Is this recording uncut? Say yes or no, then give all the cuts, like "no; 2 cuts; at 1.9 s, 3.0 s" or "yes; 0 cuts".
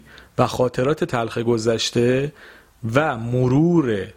yes; 0 cuts